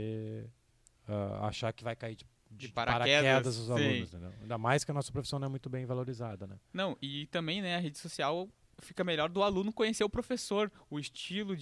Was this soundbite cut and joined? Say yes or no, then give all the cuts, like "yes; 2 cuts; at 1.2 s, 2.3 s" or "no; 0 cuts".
no; 0 cuts